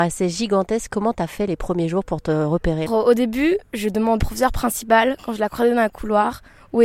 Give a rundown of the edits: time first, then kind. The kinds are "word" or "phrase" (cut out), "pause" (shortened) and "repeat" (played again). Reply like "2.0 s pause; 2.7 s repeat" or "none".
2.9 s phrase; 4.2 s phrase